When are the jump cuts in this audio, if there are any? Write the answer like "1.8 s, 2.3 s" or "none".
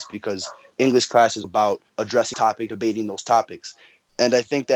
1.4 s, 2.3 s, 2.7 s